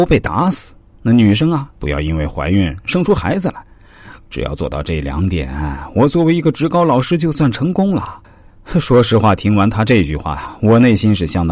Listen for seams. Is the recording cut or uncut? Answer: cut